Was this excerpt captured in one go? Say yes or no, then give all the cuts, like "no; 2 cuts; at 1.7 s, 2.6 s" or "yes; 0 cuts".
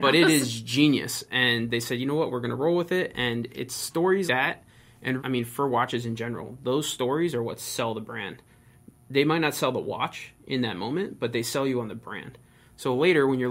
no; 2 cuts; at 4.3 s, 5.2 s